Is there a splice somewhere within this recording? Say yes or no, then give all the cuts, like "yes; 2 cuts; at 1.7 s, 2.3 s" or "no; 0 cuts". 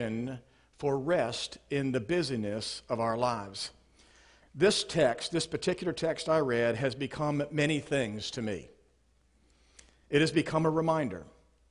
no; 0 cuts